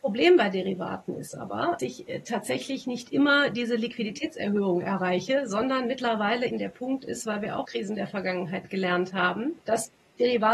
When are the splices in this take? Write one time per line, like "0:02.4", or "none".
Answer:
0:01.8
0:06.5
0:07.7
0:09.6